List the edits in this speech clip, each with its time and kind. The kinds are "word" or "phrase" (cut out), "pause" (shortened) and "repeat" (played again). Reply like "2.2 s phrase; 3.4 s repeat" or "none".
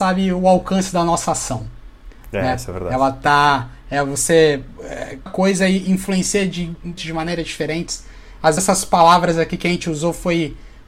5.3 s word; 7.0 s phrase; 8.6 s word